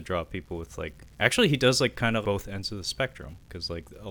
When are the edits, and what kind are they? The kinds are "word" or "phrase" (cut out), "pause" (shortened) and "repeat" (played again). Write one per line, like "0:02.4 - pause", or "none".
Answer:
0:01.1 - pause
0:02.2 - word